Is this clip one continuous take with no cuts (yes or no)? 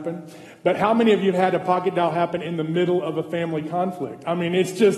yes